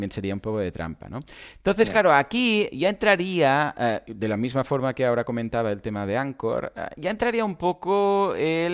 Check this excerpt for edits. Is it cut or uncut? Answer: uncut